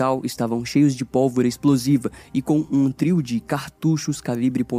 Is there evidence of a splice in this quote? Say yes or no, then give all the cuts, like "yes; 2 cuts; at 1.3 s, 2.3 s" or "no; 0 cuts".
no; 0 cuts